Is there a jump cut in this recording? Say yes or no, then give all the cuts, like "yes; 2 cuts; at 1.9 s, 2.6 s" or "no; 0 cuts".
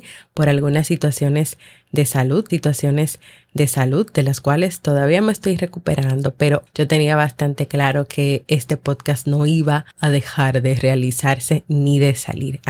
yes; 3 cuts; at 2.5 s, 6.7 s, 9.9 s